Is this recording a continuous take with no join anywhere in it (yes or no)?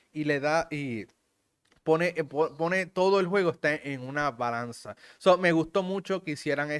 yes